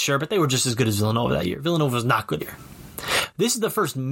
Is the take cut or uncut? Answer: cut